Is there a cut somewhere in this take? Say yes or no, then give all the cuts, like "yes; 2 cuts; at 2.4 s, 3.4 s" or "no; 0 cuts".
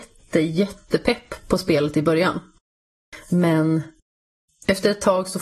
no; 0 cuts